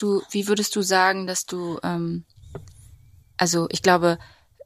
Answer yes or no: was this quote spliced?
no